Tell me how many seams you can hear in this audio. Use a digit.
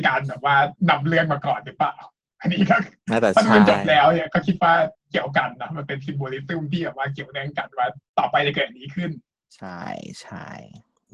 2